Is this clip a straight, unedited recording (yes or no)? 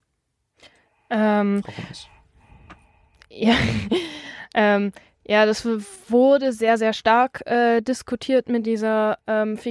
yes